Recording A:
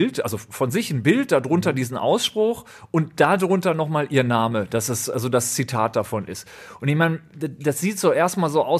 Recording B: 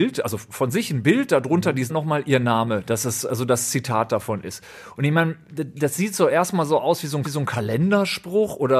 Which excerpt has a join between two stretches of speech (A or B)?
B